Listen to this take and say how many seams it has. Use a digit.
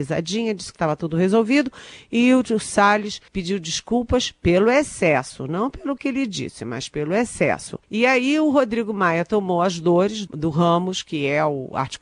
3